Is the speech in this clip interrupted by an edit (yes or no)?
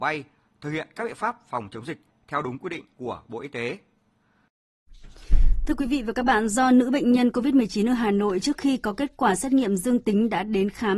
no